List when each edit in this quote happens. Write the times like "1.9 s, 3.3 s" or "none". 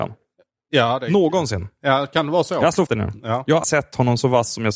2.9 s, 3.6 s